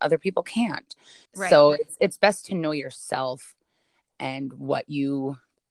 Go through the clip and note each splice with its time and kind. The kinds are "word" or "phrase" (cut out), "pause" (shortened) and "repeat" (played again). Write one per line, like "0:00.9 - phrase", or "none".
0:01.3 - pause